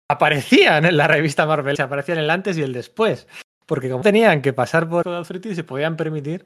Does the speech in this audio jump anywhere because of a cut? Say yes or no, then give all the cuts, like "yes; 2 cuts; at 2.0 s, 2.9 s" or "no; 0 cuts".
yes; 3 cuts; at 1.7 s, 4.0 s, 5.0 s